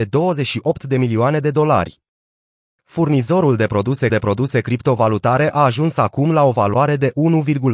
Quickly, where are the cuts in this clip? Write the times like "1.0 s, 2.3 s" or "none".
4.1 s